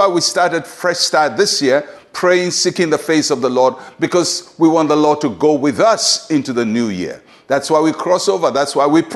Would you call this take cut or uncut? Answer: uncut